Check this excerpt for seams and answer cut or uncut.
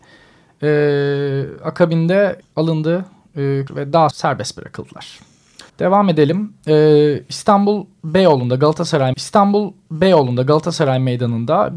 cut